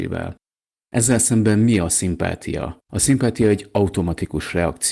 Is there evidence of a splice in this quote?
yes; 1 cut; at 2.8 s

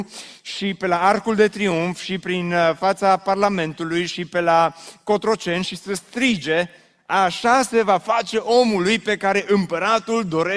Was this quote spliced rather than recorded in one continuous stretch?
no; 0 cuts

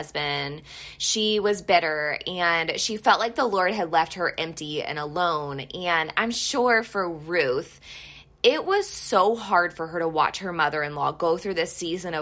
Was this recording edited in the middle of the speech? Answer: no; 0 cuts

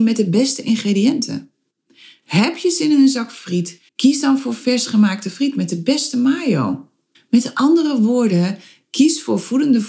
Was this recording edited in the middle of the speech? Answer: yes; 2 cuts; at 3.9 s, 7.1 s

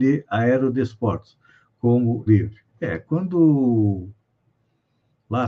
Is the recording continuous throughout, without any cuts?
no; 2 cuts; at 2.3 s, 2.7 s

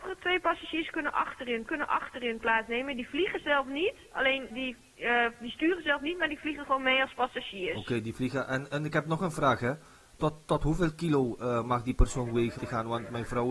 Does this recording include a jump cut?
yes; 3 cuts; at 1.7 s, 4.5 s, 12.6 s

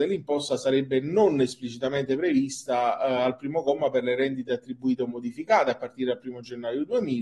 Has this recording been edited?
no; 0 cuts

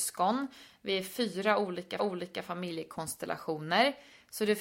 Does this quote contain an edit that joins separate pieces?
yes; 1 cut; at 2.0 s

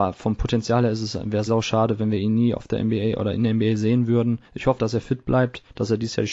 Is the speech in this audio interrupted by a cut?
yes; 2 cuts; at 1.5 s, 4.8 s

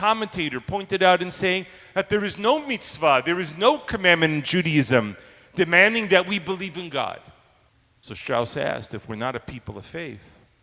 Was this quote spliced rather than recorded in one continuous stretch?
yes; 1 cut; at 7.7 s

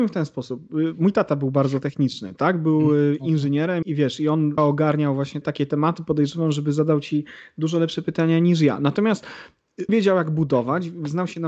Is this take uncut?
no; 4 cuts; at 3.8 s, 4.6 s, 5.4 s, 9.9 s

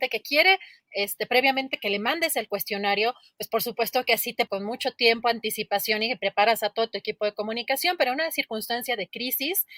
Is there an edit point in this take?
yes; 1 cut; at 4.5 s

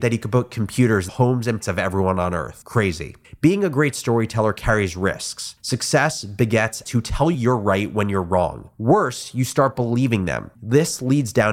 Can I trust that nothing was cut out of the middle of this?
no; 4 cuts; at 1.1 s, 1.6 s, 6.8 s, 7.3 s

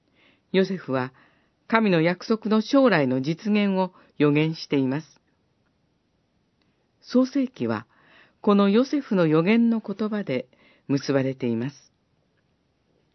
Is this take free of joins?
yes; 0 cuts

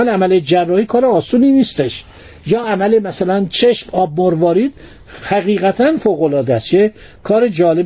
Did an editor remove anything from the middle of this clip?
no; 0 cuts

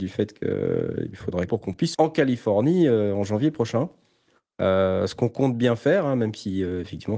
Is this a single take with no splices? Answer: no; 3 cuts; at 1.1 s, 1.5 s, 1.9 s

